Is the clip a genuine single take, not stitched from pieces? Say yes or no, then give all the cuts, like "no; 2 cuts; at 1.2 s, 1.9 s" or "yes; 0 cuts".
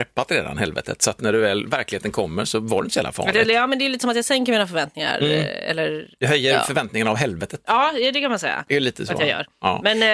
no; 1 cut; at 6.2 s